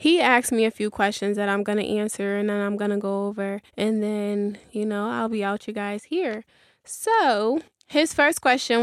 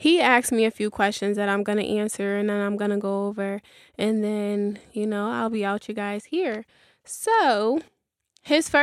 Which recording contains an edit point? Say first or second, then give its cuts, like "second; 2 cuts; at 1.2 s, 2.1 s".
first; 2 cuts; at 3.7 s, 7.7 s